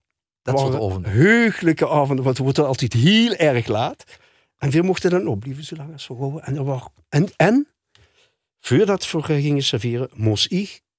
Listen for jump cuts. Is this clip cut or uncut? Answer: uncut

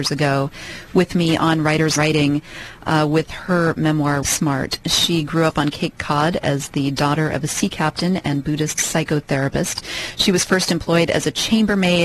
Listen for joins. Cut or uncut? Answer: cut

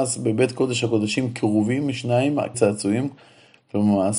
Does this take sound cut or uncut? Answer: cut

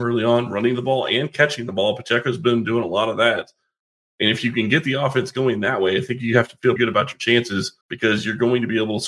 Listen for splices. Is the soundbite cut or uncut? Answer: cut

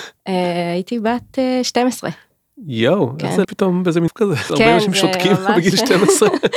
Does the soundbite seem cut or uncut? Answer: cut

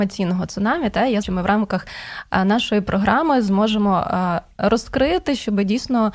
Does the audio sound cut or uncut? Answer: cut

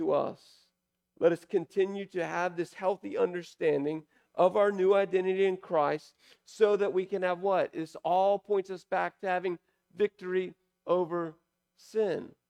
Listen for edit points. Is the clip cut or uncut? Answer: uncut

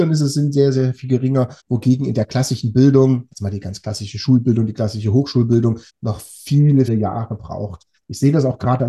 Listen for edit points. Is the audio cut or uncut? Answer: cut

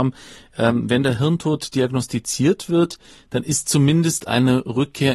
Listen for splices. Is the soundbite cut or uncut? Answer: uncut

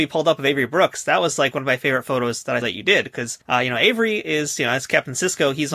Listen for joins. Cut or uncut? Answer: cut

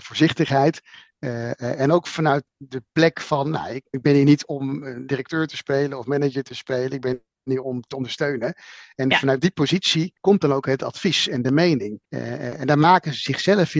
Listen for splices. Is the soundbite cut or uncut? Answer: cut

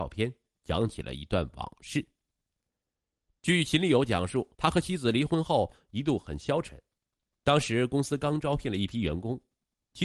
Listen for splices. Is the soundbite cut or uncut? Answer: cut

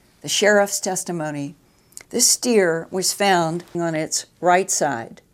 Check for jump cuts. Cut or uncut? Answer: cut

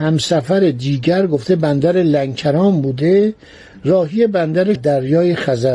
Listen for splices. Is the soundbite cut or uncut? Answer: cut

